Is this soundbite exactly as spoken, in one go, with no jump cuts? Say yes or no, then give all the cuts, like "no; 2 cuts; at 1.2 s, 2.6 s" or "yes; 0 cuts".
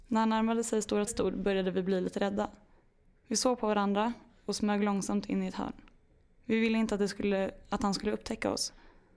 no; 2 cuts; at 1.1 s, 6.1 s